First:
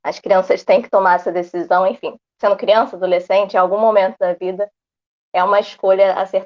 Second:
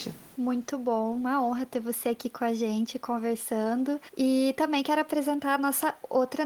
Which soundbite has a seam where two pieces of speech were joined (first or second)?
second